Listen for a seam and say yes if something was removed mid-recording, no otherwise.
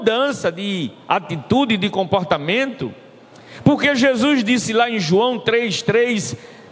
no